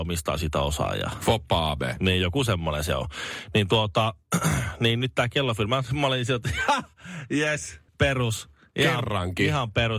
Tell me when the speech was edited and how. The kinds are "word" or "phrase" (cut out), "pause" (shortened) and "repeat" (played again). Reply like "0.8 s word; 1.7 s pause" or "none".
7.9 s pause